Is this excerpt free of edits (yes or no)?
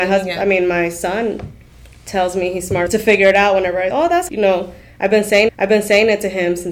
no